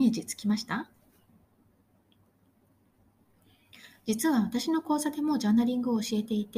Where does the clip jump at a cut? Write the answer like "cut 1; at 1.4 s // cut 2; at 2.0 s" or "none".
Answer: none